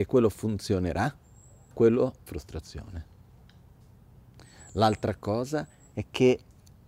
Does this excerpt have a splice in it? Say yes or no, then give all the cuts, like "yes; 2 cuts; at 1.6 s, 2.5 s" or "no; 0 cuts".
yes; 2 cuts; at 1.7 s, 2.3 s